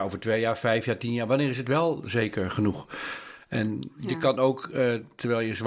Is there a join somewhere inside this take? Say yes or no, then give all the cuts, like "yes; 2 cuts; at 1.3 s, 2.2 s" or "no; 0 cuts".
no; 0 cuts